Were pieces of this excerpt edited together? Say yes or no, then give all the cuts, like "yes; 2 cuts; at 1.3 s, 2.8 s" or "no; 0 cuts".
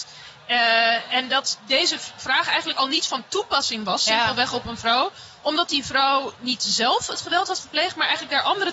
no; 0 cuts